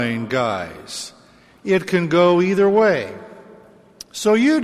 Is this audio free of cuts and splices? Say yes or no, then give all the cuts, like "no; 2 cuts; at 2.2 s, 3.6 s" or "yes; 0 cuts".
yes; 0 cuts